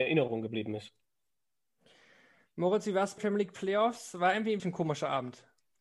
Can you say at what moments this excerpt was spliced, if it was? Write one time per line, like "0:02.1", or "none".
0:03.2
0:04.6

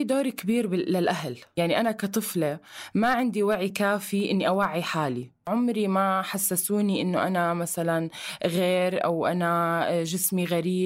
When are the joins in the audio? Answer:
none

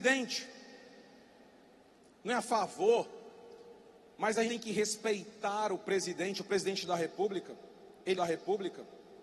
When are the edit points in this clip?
0:04.5
0:08.2

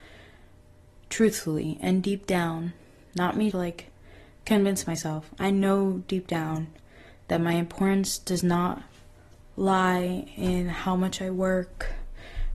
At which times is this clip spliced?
0:03.5

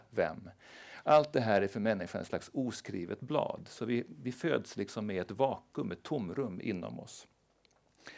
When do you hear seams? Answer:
none

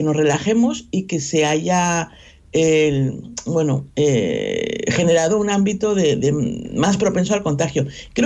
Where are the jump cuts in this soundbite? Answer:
none

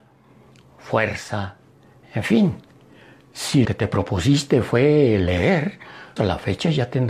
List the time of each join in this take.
0:03.6
0:06.2

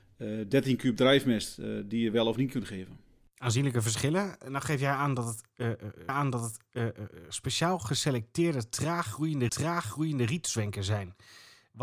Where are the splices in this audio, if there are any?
0:03.2
0:06.1
0:09.5

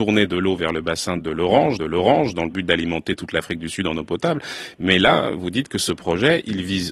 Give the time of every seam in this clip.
0:01.2
0:01.8

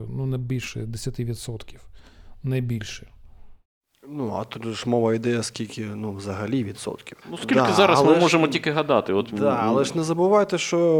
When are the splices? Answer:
0:07.2

